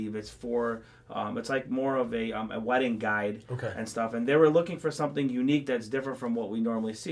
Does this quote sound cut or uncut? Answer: uncut